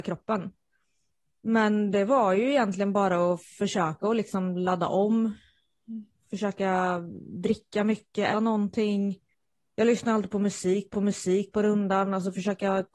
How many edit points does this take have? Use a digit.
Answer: 6